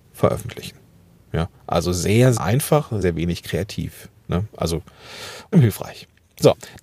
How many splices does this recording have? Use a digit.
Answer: 5